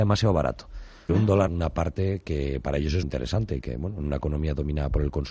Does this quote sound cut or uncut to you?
cut